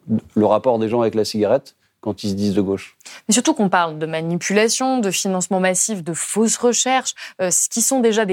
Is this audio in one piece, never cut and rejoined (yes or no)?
yes